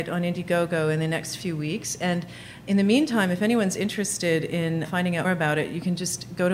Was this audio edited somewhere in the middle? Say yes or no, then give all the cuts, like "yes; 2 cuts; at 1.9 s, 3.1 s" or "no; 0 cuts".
yes; 2 cuts; at 4.8 s, 5.2 s